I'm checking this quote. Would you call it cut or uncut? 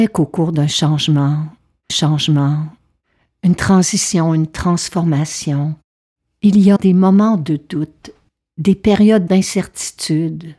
cut